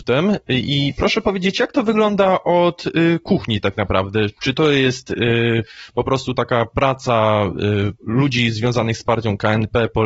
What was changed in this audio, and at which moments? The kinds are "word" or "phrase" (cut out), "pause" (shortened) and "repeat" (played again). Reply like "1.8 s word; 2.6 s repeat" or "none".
8.0 s pause